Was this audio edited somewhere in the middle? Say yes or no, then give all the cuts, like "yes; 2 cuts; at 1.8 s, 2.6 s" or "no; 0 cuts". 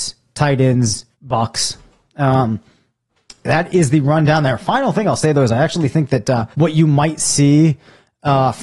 yes; 3 cuts; at 1.1 s, 3.1 s, 6.5 s